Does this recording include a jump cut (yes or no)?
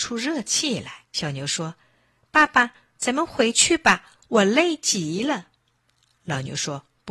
yes